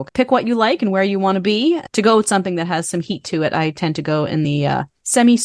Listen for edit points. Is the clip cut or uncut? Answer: uncut